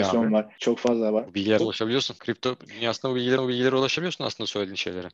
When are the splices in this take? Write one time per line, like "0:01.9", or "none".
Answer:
0:01.6
0:03.4